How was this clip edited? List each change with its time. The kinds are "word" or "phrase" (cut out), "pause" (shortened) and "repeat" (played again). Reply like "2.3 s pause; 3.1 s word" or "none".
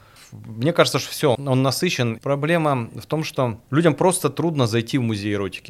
1.3 s word; 2.2 s phrase; 3.6 s pause